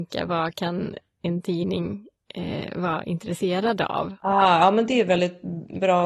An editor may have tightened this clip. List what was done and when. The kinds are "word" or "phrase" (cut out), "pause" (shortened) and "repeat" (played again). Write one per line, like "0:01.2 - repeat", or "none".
none